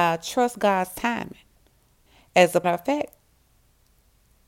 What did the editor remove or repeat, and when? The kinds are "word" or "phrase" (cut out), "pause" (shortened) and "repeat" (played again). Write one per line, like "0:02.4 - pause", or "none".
0:02.1 - pause
0:02.6 - word